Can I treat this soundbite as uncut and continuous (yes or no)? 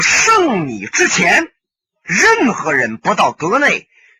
yes